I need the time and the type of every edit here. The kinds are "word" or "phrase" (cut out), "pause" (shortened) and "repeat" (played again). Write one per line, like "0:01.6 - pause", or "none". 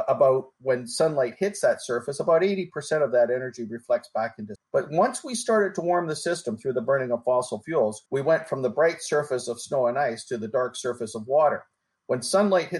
0:04.5 - word
0:08.1 - pause